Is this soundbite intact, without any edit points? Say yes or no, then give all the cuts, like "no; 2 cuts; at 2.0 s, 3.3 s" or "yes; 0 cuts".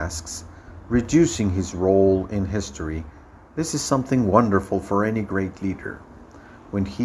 yes; 0 cuts